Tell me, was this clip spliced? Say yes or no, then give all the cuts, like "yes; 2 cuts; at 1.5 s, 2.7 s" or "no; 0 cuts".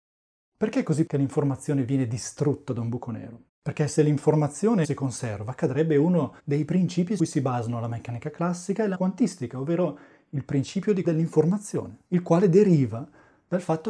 yes; 8 cuts; at 1.1 s, 3.5 s, 4.8 s, 6.4 s, 7.2 s, 8.9 s, 11.0 s, 12.0 s